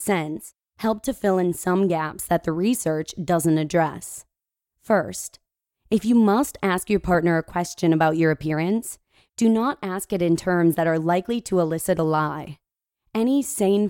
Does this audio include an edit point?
no; 0 cuts

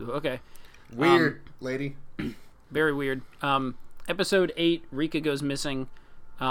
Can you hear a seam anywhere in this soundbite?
no; 0 cuts

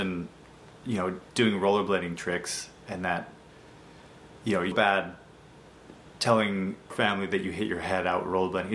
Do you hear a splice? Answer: yes; 3 cuts; at 1.3 s, 4.7 s, 6.9 s

